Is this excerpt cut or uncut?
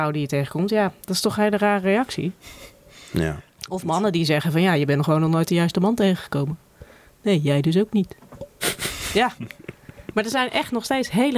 uncut